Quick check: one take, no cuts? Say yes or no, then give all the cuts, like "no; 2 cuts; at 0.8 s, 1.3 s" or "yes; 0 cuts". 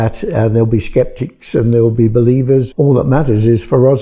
no; 1 cut; at 2.7 s